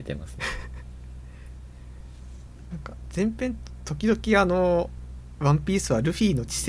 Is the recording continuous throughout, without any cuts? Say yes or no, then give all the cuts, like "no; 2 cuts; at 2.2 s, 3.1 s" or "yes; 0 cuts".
yes; 0 cuts